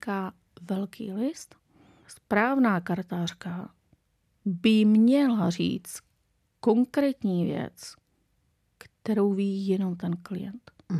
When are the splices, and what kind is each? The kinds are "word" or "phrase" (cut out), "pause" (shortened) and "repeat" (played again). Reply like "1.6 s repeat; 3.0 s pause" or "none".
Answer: none